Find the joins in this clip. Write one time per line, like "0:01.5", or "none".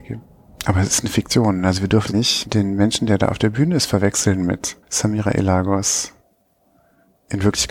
0:02.1
0:04.8